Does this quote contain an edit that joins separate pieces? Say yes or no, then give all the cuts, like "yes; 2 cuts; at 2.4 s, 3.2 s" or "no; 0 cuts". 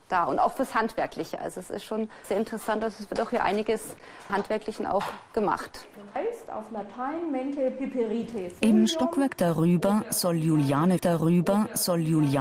yes; 3 cuts; at 2.2 s, 4.3 s, 11.0 s